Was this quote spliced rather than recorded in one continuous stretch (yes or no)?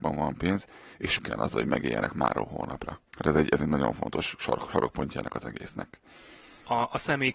yes